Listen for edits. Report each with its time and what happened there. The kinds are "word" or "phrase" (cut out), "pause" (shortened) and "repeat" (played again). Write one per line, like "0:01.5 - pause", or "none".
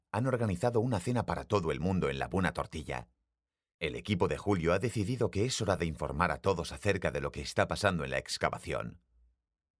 none